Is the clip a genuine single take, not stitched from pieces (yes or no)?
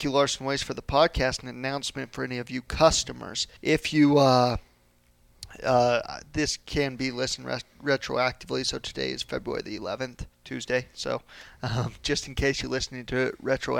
no